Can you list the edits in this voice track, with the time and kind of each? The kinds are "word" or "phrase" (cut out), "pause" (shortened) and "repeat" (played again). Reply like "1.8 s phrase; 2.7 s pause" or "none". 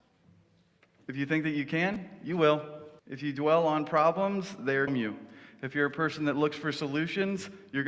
3.0 s pause; 4.9 s phrase